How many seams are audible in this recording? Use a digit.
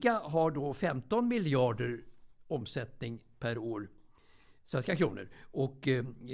0